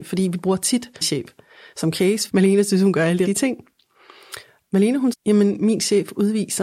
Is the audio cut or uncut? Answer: cut